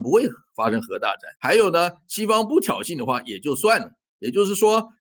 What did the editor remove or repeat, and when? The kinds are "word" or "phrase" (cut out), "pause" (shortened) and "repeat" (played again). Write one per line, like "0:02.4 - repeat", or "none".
0:01.4 - pause